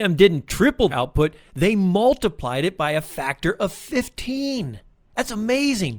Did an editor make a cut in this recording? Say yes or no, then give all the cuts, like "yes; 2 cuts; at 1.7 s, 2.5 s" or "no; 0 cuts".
yes; 1 cut; at 0.9 s